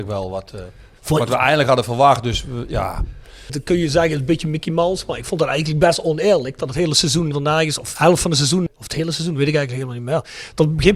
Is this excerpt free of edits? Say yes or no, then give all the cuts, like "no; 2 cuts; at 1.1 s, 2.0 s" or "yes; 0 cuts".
no; 1 cut; at 8.0 s